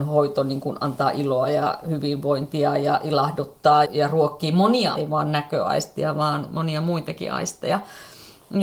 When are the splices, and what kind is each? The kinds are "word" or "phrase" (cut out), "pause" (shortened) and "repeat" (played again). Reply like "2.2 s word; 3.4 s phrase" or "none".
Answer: 3.8 s word; 4.9 s word